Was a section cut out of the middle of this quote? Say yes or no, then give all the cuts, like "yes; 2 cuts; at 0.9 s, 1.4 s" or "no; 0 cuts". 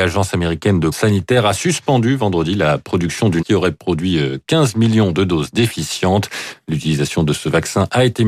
yes; 2 cuts; at 0.9 s, 3.4 s